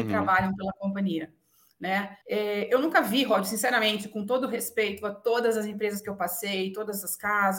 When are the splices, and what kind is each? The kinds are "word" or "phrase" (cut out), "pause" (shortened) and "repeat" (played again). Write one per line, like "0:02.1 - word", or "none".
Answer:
0:02.2 - pause